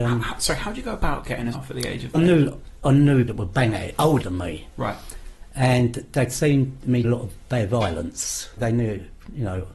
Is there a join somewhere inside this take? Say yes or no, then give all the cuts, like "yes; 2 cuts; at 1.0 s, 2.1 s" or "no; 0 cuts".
yes; 6 cuts; at 1.5 s, 2.1 s, 3.3 s, 4.2 s, 7.0 s, 8.6 s